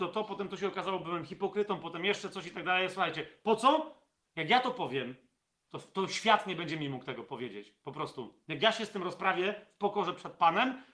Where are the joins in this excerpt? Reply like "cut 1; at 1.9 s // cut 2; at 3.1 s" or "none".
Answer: none